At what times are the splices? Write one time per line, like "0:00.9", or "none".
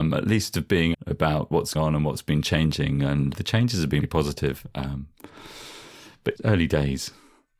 0:00.9
0:01.7
0:03.3
0:04.0
0:06.3